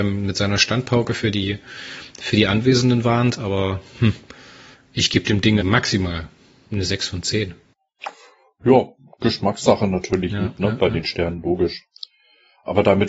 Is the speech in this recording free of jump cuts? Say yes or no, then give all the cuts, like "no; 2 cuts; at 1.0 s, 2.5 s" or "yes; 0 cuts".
no; 1 cut; at 5.6 s